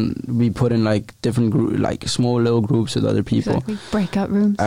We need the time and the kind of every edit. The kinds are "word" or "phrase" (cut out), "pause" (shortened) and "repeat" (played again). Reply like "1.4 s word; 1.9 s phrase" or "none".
none